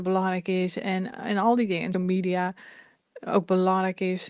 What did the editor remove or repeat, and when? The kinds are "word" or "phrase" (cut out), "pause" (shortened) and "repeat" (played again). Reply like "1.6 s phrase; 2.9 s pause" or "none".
1.9 s word